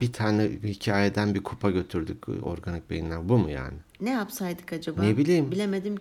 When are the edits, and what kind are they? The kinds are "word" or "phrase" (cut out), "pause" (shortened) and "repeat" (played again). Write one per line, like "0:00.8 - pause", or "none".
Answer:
0:03.9 - pause